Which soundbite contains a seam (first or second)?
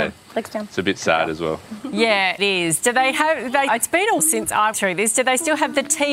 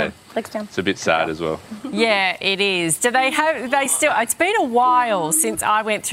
first